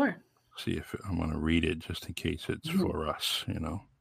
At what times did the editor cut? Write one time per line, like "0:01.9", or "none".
none